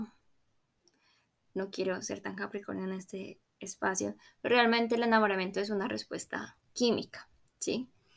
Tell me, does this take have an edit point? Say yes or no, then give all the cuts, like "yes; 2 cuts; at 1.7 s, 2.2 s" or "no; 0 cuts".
no; 0 cuts